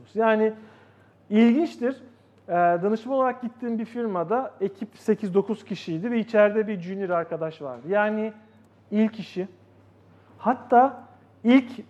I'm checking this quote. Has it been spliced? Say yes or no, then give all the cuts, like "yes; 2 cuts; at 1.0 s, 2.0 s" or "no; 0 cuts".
no; 0 cuts